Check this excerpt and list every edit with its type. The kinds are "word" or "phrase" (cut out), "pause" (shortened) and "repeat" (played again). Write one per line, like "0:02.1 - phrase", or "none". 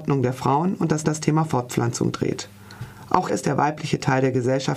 0:01.0 - repeat
0:03.3 - word